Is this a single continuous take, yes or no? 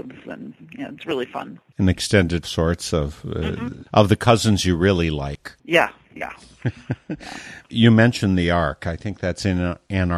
no